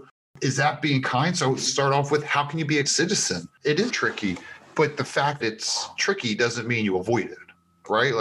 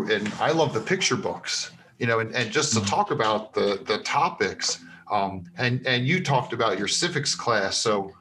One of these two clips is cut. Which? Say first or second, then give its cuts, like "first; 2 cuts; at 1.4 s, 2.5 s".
first; 4 cuts; at 1.7 s, 2.8 s, 3.9 s, 5.4 s